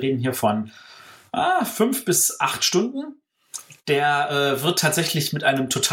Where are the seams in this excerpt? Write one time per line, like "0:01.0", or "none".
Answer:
none